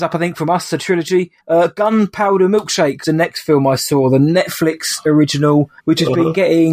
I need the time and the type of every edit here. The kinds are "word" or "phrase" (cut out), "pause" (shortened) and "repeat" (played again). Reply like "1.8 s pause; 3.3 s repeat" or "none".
1.4 s pause; 3.0 s word; 5.8 s pause